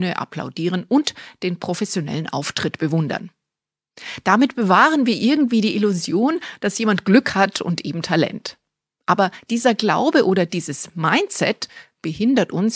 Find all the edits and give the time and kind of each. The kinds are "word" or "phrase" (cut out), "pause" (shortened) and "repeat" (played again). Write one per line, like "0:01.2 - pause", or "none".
none